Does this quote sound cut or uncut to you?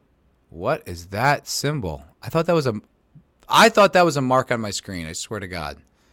uncut